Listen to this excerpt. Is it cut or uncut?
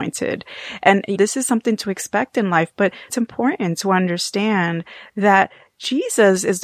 cut